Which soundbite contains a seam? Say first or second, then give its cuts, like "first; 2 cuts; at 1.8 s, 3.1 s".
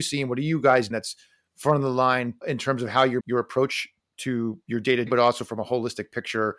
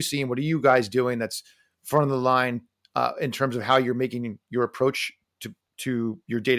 first; 5 cuts; at 0.9 s, 2.4 s, 3.2 s, 4.1 s, 5.1 s